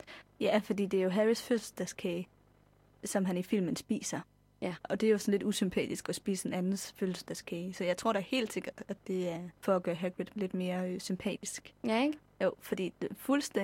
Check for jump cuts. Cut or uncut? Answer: cut